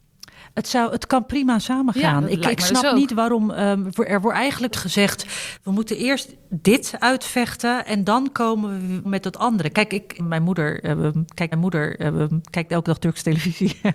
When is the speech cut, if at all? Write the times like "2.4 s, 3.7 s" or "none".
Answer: 4.7 s, 9.0 s, 10.2 s, 11.5 s